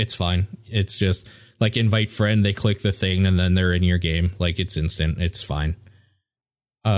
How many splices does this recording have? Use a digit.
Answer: 0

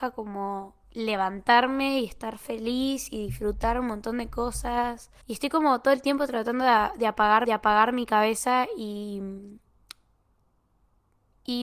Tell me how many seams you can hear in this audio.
2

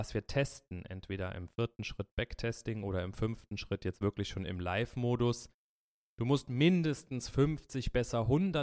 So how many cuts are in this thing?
0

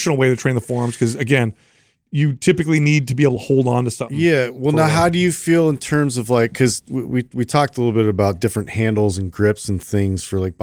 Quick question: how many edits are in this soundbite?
0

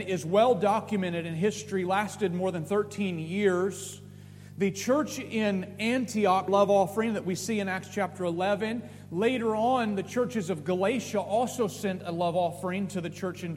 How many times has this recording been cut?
1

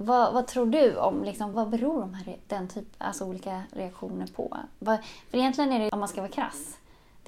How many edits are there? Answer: 1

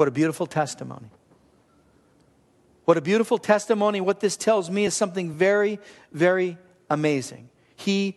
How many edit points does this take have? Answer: 0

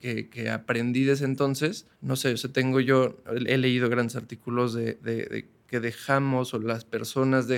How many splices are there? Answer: 1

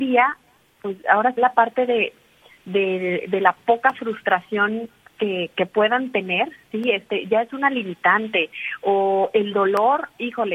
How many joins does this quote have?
1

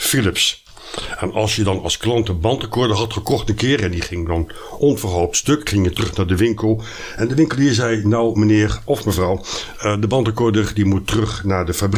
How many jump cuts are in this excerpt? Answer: 0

